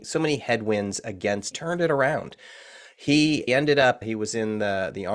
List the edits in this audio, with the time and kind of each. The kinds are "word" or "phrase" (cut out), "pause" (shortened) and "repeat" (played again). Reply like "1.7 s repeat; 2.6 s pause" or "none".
1.5 s phrase; 3.5 s word; 4.0 s word